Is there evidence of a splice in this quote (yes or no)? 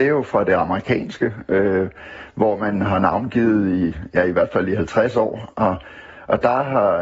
no